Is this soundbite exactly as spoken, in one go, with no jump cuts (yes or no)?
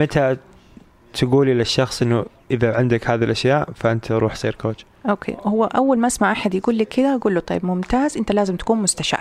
yes